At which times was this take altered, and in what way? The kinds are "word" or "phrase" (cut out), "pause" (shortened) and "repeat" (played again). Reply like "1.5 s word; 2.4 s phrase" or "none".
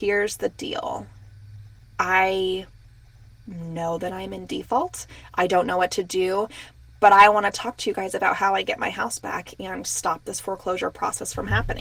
none